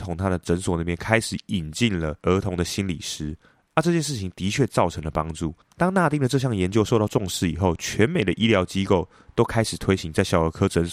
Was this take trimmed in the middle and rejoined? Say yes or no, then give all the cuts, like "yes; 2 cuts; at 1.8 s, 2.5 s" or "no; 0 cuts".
no; 0 cuts